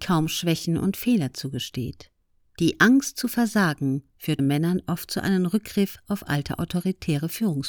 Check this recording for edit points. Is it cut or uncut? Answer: cut